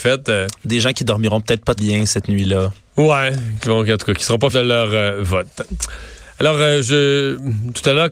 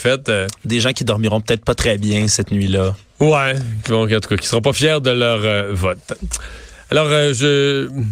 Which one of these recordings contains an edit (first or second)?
first